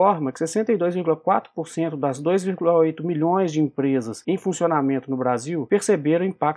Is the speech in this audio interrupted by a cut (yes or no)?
no